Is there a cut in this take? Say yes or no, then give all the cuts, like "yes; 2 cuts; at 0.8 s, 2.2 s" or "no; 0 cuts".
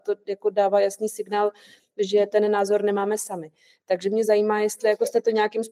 no; 0 cuts